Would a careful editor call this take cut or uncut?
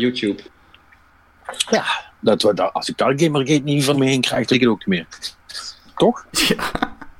cut